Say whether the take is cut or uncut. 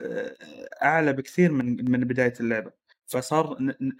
uncut